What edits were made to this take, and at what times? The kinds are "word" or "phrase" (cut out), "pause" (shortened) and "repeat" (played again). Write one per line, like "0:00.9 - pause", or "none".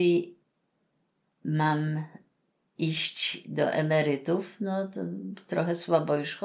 none